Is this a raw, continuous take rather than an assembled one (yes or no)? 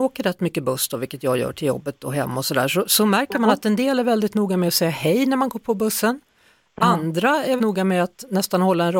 no